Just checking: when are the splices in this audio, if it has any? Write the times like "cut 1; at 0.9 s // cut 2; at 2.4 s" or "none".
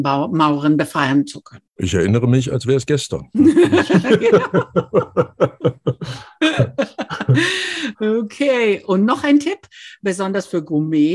cut 1; at 1.7 s